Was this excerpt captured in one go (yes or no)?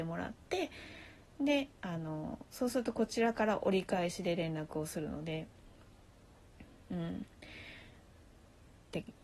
no